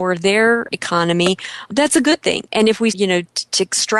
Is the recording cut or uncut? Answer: cut